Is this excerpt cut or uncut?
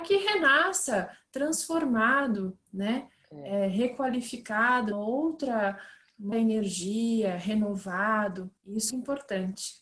cut